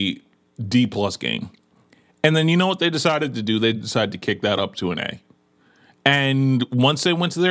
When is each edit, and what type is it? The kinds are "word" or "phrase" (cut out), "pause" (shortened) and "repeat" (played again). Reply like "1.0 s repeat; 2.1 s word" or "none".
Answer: none